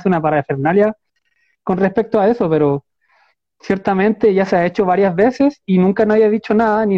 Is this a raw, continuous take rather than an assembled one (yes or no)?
yes